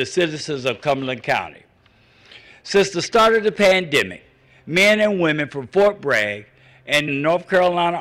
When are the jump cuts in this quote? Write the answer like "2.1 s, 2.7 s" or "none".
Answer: 7.1 s